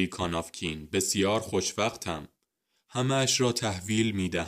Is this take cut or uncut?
uncut